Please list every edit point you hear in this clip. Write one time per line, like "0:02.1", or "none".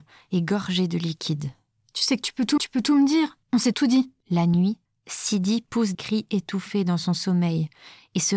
0:02.6
0:03.4
0:03.7
0:04.9
0:05.9